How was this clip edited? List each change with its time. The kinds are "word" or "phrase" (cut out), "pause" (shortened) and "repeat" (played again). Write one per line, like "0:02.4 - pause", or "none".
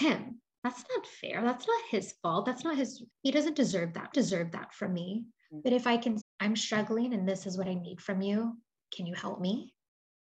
0:03.1 - pause
0:04.1 - repeat
0:06.2 - word
0:08.9 - word